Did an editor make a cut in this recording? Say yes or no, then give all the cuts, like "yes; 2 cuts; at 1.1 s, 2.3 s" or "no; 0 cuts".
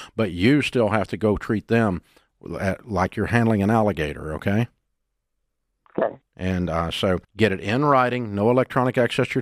yes; 2 cuts; at 6.3 s, 7.2 s